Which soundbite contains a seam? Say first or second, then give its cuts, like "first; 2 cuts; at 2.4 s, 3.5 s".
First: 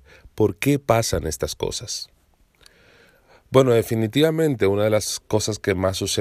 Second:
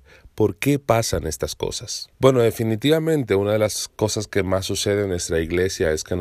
second; 1 cut; at 2.1 s